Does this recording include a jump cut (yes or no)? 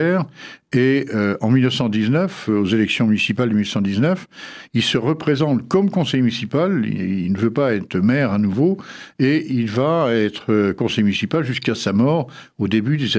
no